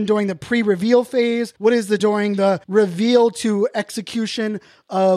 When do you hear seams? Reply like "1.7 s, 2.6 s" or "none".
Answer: 1.6 s, 2.0 s, 2.6 s